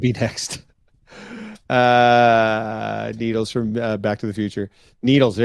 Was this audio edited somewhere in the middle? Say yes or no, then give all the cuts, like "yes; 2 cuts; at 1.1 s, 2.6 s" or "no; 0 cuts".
no; 0 cuts